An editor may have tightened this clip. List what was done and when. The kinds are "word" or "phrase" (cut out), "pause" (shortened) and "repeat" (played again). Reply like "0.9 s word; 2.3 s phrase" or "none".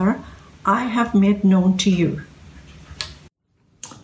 none